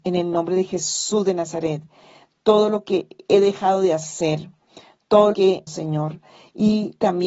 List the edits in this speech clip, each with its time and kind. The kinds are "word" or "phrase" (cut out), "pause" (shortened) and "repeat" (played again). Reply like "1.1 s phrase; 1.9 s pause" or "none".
5.3 s word; 5.7 s phrase